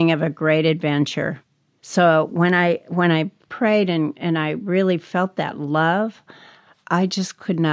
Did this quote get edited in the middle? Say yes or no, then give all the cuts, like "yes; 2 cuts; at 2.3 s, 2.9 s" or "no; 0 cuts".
no; 0 cuts